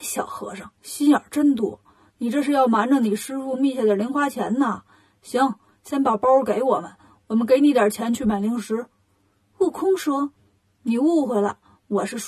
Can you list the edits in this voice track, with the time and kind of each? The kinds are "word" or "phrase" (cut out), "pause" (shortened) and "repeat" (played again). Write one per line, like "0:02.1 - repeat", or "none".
none